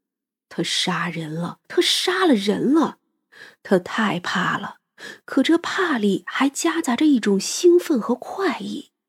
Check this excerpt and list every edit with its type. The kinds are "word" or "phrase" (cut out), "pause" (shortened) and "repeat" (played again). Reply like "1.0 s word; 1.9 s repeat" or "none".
1.6 s pause